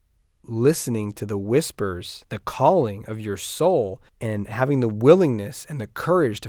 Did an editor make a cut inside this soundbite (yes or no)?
yes